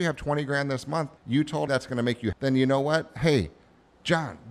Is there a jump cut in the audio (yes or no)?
yes